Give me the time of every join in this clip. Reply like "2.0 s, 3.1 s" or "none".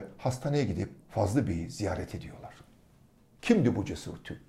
1.0 s